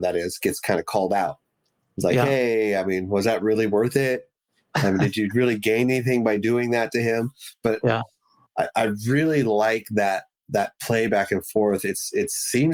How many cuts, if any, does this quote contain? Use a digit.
0